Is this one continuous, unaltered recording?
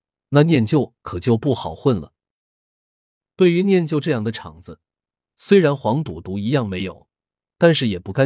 yes; 0 cuts

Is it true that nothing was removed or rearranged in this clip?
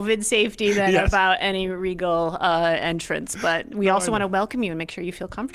yes; 0 cuts

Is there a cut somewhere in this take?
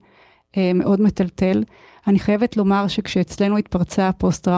no; 0 cuts

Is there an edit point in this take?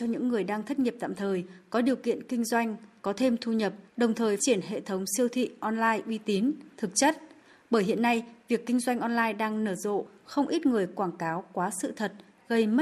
yes; 2 cuts; at 3.9 s, 4.4 s

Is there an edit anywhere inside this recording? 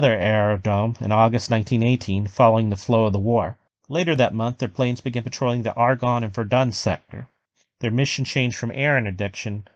no; 0 cuts

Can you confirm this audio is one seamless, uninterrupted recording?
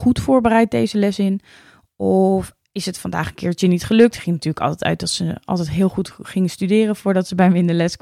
yes; 0 cuts

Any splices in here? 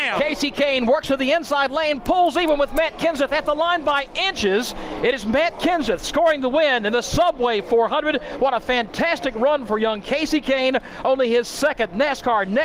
no; 0 cuts

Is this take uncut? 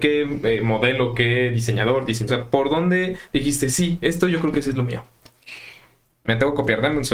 no; 1 cut; at 2.3 s

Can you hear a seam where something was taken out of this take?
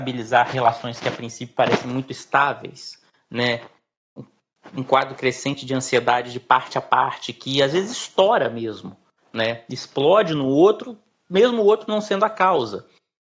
no; 0 cuts

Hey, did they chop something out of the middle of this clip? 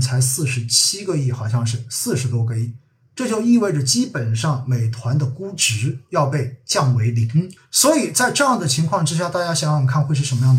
yes; 1 cut; at 7.6 s

